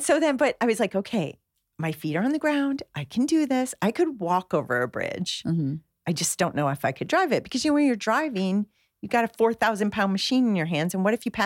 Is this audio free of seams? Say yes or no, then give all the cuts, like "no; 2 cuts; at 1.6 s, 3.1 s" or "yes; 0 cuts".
yes; 0 cuts